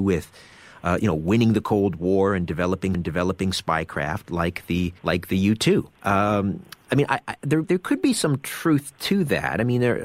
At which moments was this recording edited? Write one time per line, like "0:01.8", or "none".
0:02.9
0:05.0
0:05.9
0:07.6